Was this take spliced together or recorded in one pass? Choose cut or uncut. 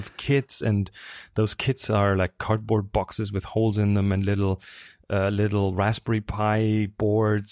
uncut